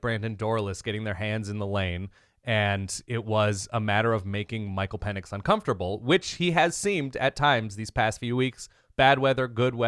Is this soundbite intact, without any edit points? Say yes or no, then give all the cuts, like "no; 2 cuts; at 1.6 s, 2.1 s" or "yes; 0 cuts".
yes; 0 cuts